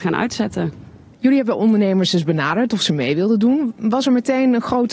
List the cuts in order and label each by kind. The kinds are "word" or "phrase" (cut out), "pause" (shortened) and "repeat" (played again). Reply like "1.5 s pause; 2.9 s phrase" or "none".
none

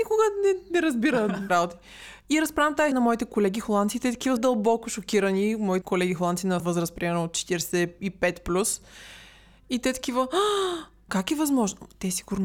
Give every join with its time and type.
1.5 s word; 2.9 s word; 4.4 s word; 5.8 s word; 6.6 s word; 11.1 s word

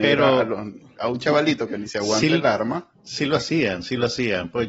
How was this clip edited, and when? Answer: none

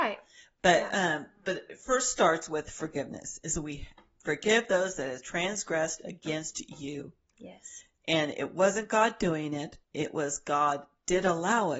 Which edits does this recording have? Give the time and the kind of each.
9.8 s pause

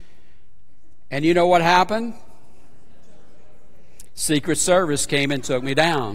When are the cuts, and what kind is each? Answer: none

